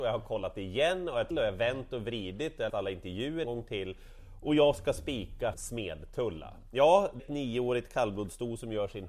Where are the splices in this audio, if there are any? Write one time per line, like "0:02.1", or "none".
0:01.3
0:02.7
0:03.4
0:05.5
0:07.2